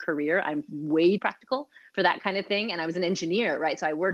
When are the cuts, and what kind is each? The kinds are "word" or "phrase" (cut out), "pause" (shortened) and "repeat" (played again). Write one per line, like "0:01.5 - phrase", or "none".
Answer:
0:01.2 - word